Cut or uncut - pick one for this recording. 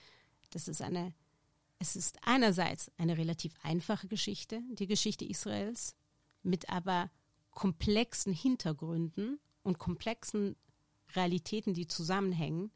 uncut